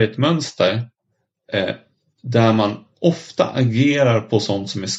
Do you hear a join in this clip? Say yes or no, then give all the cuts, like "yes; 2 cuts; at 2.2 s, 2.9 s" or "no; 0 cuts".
no; 0 cuts